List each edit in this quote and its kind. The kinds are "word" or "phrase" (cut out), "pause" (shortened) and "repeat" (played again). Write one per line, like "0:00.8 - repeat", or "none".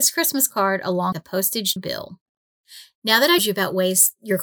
0:01.1 - word
0:01.8 - word
0:03.4 - word